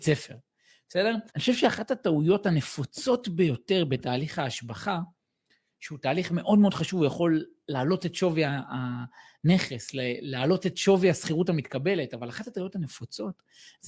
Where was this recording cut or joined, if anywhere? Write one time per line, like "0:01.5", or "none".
0:01.3